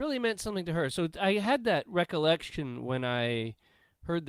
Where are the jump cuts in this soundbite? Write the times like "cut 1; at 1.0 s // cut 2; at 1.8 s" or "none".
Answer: none